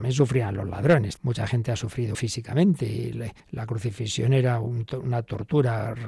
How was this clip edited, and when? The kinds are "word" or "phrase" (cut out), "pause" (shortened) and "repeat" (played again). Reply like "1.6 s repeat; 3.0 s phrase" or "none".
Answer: 1.2 s word; 2.1 s word; 3.4 s pause